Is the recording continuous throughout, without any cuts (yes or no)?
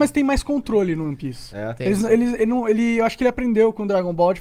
yes